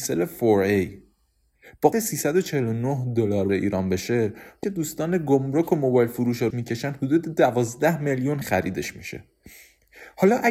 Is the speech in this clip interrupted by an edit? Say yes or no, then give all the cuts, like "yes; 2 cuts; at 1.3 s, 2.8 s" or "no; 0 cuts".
yes; 5 cuts; at 1.9 s, 3.5 s, 4.6 s, 6.5 s, 8.4 s